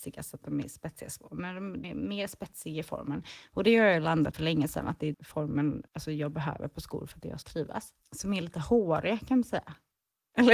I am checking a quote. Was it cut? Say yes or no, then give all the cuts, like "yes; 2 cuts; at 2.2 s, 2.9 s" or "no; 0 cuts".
yes; 5 cuts; at 1.8 s, 4.3 s, 5.1 s, 5.9 s, 7.4 s